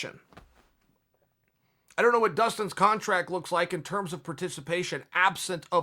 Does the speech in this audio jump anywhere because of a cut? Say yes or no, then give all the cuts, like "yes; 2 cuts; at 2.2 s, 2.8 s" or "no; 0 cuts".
no; 0 cuts